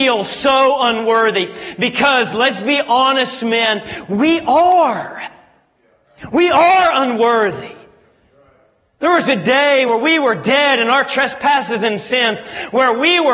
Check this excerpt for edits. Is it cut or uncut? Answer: uncut